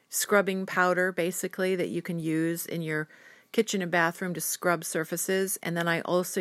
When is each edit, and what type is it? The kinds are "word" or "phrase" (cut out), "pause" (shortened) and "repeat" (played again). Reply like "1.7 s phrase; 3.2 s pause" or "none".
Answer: none